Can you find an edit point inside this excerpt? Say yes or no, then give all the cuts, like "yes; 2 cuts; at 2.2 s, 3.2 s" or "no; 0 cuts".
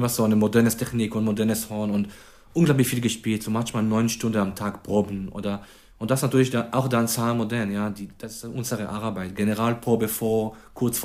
no; 0 cuts